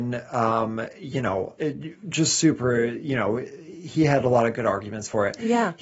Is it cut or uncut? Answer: cut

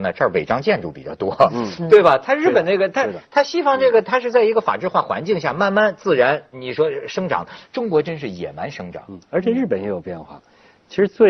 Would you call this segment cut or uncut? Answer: cut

